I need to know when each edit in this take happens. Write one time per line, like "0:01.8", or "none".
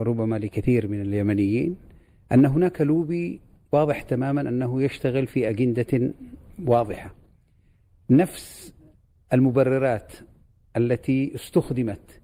none